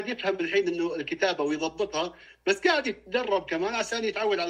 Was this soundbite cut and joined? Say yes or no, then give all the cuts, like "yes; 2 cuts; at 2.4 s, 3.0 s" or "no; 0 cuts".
no; 0 cuts